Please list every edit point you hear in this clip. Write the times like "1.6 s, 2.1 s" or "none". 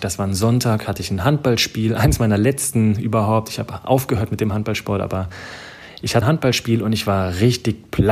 6.2 s